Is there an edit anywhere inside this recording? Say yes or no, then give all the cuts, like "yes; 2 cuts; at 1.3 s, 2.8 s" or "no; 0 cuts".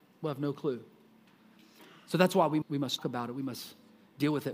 yes; 2 cuts; at 2.6 s, 3.0 s